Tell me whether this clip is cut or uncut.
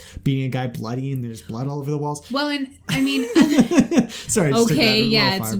uncut